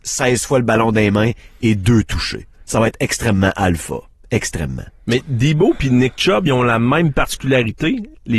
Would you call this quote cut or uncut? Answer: cut